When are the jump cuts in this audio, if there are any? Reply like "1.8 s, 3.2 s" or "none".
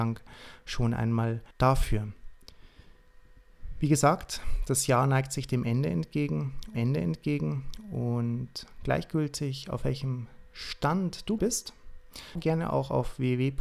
1.5 s, 6.7 s, 11.4 s, 12.4 s